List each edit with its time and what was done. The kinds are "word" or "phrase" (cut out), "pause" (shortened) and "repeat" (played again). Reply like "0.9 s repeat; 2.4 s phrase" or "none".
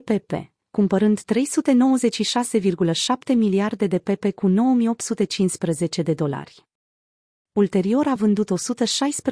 none